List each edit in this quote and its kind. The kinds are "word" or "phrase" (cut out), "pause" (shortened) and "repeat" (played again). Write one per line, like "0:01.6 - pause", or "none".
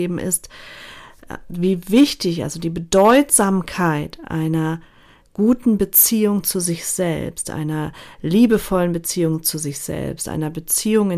none